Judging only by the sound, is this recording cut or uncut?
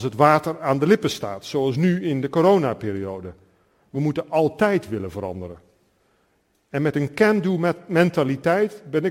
uncut